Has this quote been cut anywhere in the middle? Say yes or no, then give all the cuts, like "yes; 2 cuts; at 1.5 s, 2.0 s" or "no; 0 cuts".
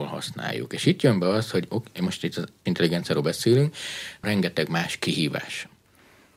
yes; 2 cuts; at 2.7 s, 4.2 s